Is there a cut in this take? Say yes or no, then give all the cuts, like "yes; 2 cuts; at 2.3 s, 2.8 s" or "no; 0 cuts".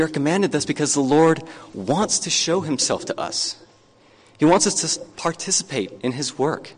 no; 0 cuts